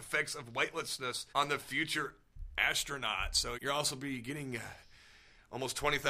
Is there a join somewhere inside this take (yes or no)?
yes